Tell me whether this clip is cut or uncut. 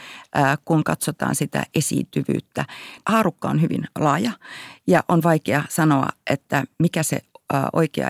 uncut